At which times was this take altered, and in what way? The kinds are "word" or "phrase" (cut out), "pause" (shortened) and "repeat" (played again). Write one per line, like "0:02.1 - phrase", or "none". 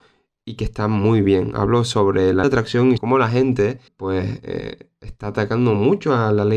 0:02.4 - phrase
0:03.0 - word
0:03.9 - pause